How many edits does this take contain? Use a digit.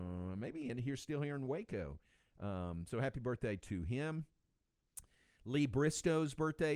0